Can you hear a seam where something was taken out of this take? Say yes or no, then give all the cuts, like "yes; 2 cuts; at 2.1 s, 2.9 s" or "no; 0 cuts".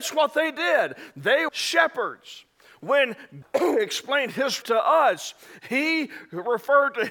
yes; 3 cuts; at 1.5 s, 3.4 s, 4.6 s